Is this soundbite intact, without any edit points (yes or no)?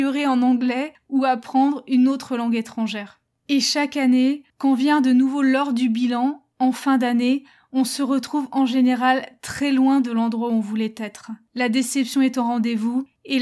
yes